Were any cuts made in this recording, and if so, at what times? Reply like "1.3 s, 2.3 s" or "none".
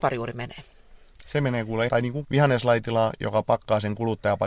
1.9 s, 2.2 s